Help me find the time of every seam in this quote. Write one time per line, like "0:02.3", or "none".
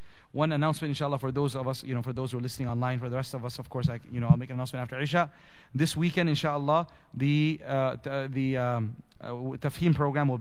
none